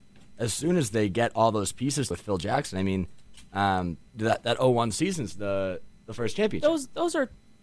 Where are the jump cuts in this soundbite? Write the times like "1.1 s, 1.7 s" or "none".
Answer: 2.1 s